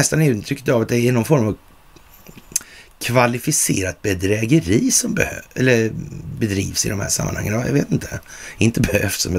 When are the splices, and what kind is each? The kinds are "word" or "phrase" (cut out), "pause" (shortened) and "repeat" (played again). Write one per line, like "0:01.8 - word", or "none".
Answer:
none